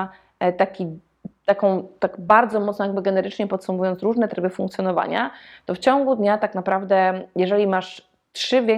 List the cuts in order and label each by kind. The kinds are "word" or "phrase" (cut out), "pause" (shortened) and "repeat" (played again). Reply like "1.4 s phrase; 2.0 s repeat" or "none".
none